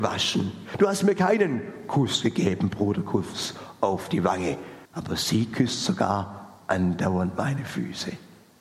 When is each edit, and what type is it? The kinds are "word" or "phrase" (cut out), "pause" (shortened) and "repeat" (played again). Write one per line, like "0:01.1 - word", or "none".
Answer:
0:04.9 - pause